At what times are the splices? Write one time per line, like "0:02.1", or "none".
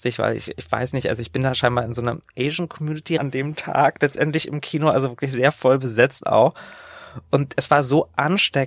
0:03.2

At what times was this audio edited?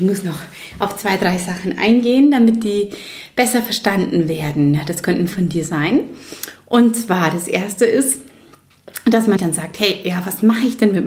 0:05.3
0:09.4

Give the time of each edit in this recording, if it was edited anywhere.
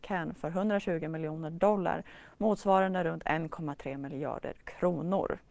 none

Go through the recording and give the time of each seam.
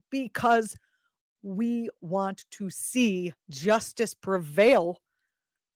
0:03.4

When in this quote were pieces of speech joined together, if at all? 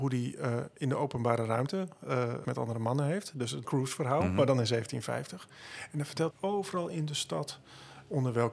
0:02.4
0:03.6
0:06.3

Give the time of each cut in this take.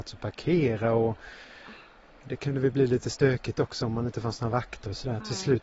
none

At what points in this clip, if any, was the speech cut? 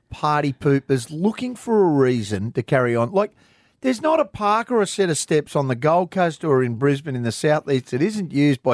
none

